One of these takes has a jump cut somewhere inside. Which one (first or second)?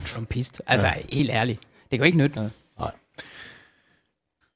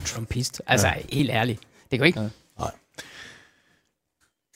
second